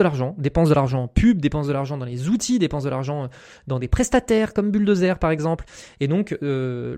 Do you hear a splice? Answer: no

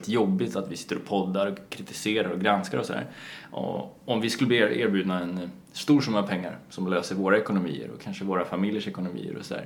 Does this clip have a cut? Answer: no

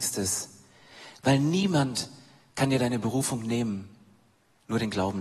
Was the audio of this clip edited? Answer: no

